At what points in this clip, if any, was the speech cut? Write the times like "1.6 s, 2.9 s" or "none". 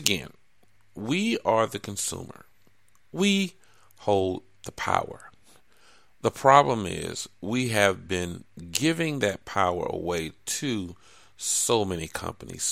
none